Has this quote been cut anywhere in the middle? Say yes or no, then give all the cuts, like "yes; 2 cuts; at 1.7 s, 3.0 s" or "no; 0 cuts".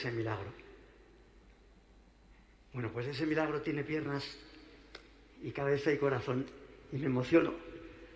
no; 0 cuts